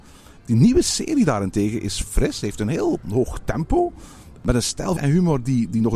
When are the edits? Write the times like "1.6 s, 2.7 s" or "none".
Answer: 5.0 s

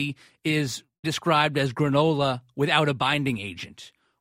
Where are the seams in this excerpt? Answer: 1.0 s

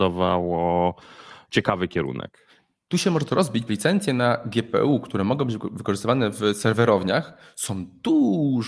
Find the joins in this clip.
3.7 s

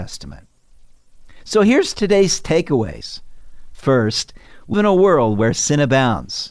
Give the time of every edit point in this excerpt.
4.7 s

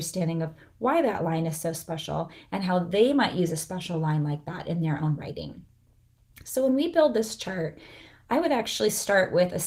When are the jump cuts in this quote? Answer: none

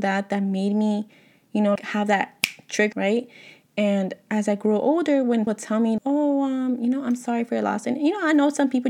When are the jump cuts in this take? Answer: 1.8 s, 2.9 s, 5.5 s, 6.0 s

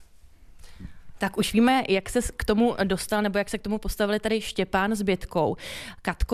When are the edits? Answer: none

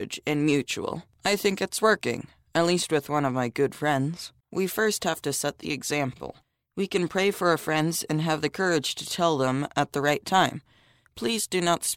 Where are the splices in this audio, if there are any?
4.4 s, 6.4 s

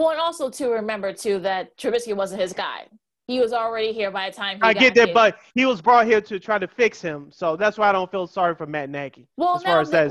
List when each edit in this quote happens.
none

